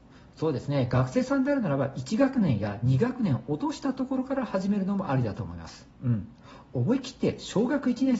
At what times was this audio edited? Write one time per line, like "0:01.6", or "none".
0:05.9